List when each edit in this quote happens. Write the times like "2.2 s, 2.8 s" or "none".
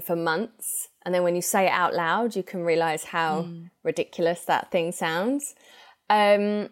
none